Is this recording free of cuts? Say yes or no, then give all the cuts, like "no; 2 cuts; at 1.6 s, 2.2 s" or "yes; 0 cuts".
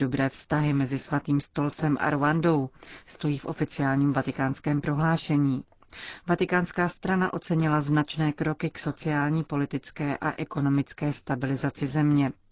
yes; 0 cuts